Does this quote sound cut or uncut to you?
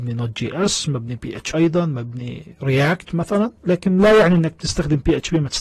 cut